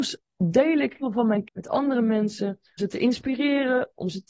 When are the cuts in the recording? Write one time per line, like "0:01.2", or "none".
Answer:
0:01.0
0:01.4
0:02.8